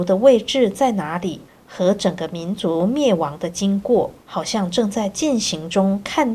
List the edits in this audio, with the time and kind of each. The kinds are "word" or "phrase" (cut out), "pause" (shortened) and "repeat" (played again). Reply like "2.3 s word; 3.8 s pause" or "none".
4.2 s pause